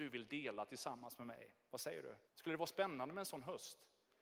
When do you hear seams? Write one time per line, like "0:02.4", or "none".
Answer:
0:02.3